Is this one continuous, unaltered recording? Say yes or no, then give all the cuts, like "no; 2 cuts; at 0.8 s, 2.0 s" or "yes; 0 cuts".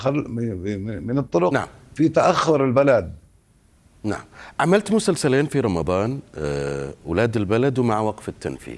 yes; 0 cuts